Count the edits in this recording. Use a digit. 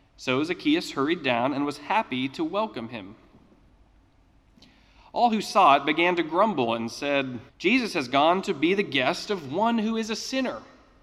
1